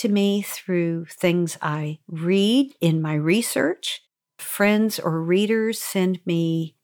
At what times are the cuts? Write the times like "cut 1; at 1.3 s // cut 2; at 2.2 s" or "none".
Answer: none